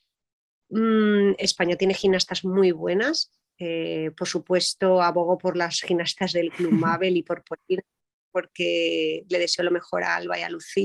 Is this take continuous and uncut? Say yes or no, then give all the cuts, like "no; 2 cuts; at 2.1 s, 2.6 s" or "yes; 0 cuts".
yes; 0 cuts